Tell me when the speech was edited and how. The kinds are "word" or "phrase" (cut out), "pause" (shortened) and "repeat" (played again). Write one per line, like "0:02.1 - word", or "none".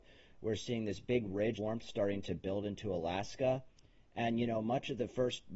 0:01.6 - word

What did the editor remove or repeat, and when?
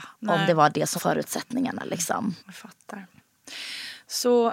0:01.0 - word
0:02.4 - pause

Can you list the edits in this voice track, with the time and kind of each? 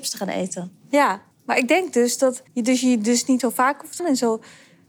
0:01.3 - pause
0:02.5 - pause
0:03.4 - word
0:04.0 - word

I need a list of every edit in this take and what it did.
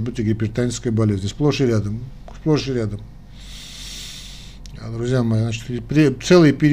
none

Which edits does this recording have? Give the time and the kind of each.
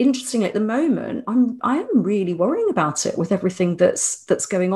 none

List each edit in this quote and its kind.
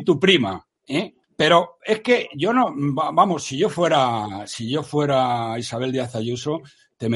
0:01.2 - pause

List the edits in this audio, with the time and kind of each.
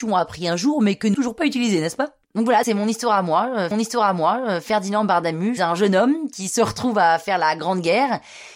0:01.1 - phrase
0:02.2 - pause
0:02.6 - word
0:03.7 - repeat
0:05.6 - word

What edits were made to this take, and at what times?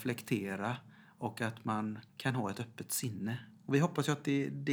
0:02.1 - pause

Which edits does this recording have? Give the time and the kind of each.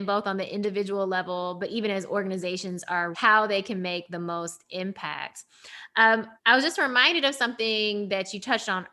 0:03.1 - word
0:06.4 - pause

